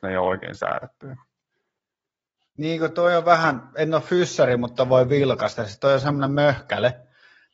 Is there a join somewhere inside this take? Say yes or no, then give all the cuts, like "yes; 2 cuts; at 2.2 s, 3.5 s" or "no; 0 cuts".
no; 0 cuts